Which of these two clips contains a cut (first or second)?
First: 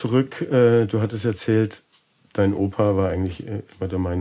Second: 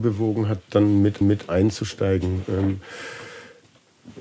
second